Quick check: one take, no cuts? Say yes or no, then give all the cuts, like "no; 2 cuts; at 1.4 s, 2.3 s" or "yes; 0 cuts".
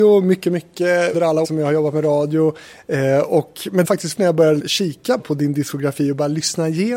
no; 6 cuts; at 1.1 s, 1.4 s, 3.8 s, 4.2 s, 4.6 s, 5.2 s